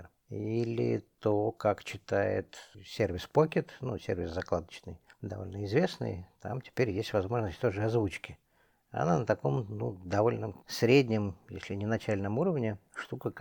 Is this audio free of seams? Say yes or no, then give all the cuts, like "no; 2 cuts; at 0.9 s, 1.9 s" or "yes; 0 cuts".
yes; 0 cuts